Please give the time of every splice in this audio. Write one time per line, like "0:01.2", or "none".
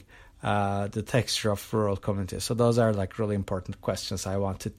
none